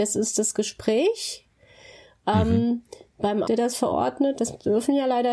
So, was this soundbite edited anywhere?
yes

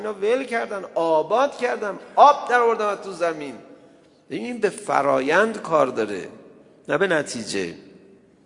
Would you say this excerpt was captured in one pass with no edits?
yes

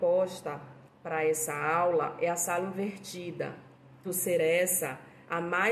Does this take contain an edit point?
yes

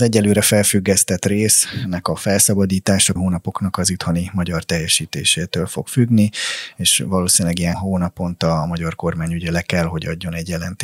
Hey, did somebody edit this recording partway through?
yes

